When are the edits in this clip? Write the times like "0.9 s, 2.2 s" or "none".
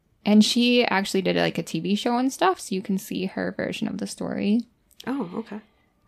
none